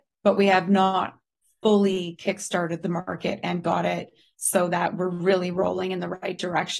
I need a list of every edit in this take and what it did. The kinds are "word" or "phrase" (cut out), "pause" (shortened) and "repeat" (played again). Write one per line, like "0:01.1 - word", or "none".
none